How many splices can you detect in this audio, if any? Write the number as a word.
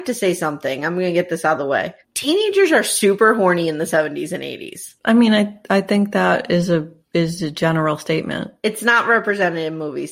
two